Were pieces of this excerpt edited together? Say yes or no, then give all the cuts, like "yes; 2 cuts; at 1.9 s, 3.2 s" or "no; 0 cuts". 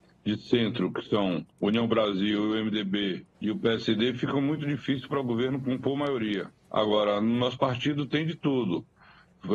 yes; 3 cuts; at 1.5 s, 3.3 s, 6.6 s